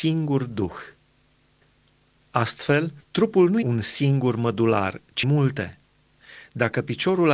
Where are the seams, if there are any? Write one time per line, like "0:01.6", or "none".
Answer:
0:03.0
0:03.6
0:05.2